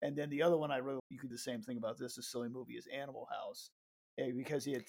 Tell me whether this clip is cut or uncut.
cut